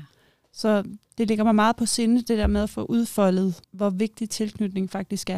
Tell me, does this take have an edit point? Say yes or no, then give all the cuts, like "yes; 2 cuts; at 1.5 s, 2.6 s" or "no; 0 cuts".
yes; 1 cut; at 3.6 s